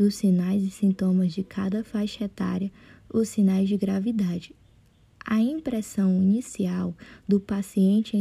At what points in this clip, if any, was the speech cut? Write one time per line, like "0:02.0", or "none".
none

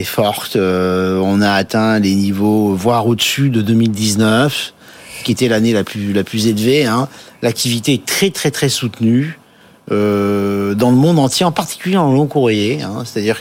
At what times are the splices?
none

